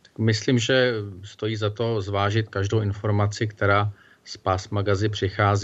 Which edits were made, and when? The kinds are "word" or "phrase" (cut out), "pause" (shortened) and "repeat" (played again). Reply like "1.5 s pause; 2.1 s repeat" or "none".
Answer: none